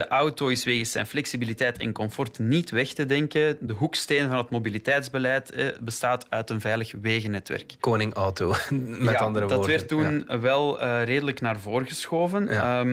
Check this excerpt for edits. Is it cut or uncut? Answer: uncut